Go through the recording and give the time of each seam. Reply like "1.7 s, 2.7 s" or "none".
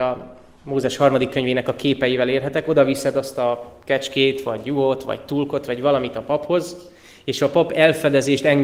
none

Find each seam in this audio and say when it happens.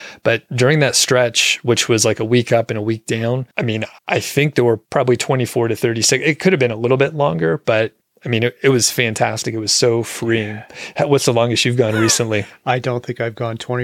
3.5 s, 4.0 s, 4.8 s, 8.0 s

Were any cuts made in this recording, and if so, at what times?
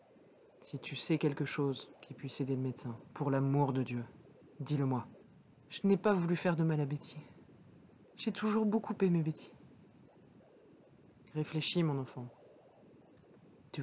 3.1 s, 5.2 s

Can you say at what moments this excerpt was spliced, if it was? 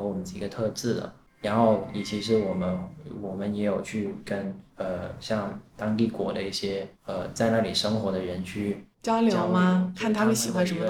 4.7 s, 7.0 s, 8.9 s

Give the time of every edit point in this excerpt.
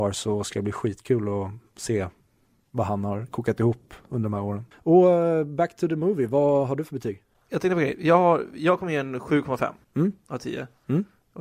none

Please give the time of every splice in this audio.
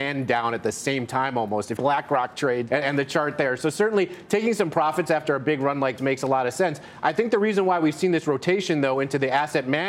1.8 s, 2.7 s, 6.0 s

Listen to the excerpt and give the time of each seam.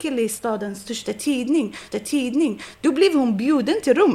1.9 s

